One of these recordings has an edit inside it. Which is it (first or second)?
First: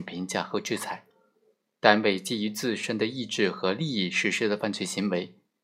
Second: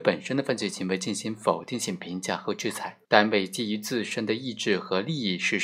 second